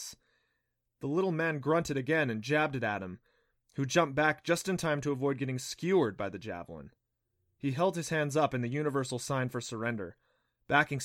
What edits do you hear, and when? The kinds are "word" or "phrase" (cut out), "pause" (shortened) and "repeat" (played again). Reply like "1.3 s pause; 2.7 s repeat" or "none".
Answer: none